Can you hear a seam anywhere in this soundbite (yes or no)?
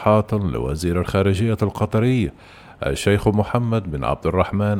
no